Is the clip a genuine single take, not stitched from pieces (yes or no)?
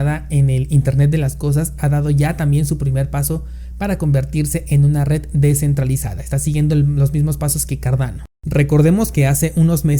no